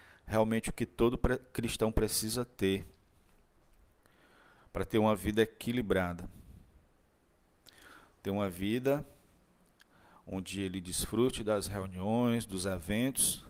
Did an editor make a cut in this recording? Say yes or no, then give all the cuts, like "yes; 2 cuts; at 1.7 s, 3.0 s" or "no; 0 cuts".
no; 0 cuts